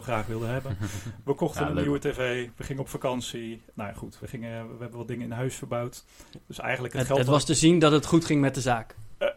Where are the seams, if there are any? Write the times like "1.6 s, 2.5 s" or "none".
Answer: 4.2 s